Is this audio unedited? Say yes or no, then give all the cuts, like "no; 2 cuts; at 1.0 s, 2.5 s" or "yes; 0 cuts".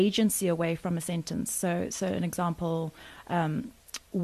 yes; 0 cuts